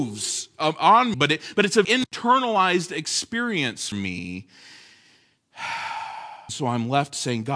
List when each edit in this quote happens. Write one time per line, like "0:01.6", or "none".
0:01.1
0:01.8
0:03.9
0:06.5